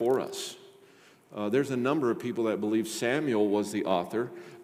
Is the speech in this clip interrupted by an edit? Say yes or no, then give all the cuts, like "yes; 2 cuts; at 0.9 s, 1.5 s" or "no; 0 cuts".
no; 0 cuts